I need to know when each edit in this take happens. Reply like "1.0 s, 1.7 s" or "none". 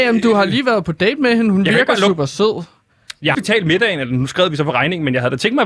3.3 s